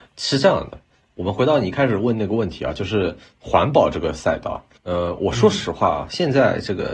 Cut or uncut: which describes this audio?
cut